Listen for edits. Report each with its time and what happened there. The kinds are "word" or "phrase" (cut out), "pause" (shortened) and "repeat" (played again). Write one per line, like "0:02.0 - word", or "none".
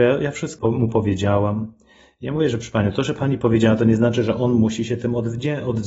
none